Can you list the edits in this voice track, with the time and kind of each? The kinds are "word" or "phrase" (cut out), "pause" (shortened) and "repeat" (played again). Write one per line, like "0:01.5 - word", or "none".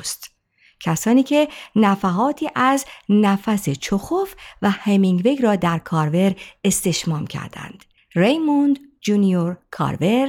0:08.0 - pause

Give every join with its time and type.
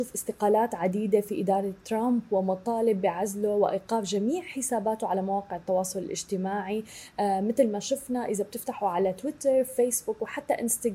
none

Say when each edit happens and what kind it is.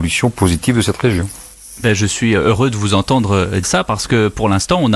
0:03.6 - word

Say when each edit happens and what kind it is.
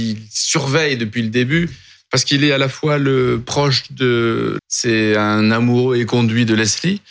0:04.6 - word

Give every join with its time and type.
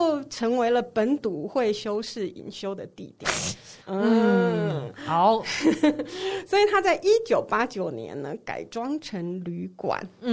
0:03.8 - pause

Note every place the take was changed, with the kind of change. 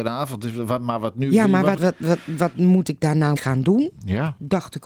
0:01.8 - word
0:03.4 - word

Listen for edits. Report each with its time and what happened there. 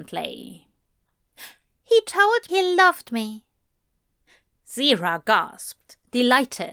0:02.5 - word

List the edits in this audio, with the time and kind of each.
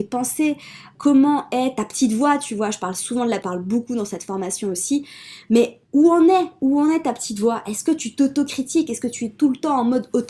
0:00.9 - word
0:03.4 - phrase
0:05.8 - pause

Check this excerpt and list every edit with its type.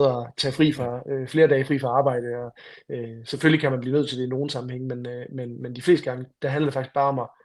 none

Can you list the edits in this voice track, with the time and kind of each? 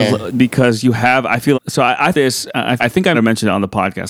0:01.5 - word
0:02.1 - word
0:02.8 - word
0:03.1 - word

